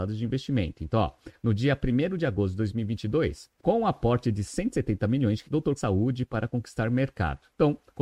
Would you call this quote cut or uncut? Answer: cut